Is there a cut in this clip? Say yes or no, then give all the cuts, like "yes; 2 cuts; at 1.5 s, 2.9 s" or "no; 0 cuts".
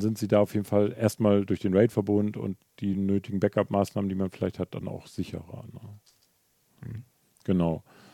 no; 0 cuts